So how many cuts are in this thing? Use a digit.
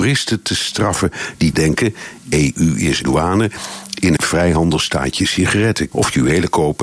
4